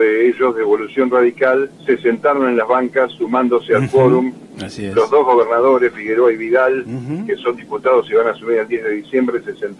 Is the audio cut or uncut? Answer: cut